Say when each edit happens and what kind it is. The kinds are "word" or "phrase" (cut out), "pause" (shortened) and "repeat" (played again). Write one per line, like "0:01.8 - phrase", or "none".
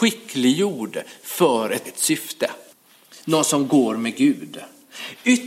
0:01.8 - word
0:02.7 - pause